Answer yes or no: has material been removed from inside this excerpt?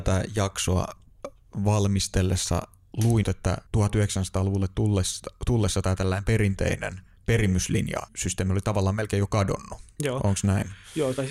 yes